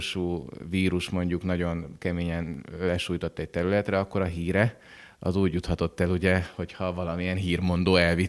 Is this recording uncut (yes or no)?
yes